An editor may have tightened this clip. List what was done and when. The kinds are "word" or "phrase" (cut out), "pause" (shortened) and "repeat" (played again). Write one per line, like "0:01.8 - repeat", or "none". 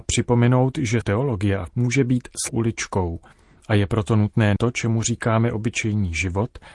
0:01.0 - word
0:01.7 - word
0:02.5 - word
0:04.6 - word